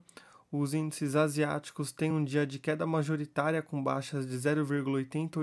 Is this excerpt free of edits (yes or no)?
yes